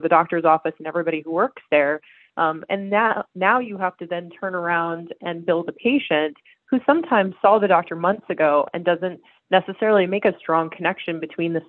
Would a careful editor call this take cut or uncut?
uncut